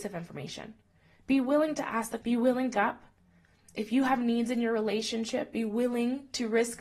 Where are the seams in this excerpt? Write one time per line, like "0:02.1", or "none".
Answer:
0:02.2
0:02.7